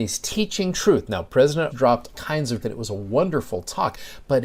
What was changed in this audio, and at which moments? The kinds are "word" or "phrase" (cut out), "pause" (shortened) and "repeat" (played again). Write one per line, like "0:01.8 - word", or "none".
0:01.7 - word
0:02.1 - word
0:02.6 - word